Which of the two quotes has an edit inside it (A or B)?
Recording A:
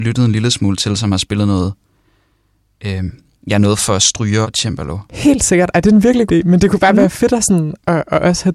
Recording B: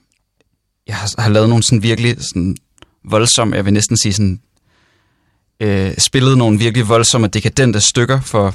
A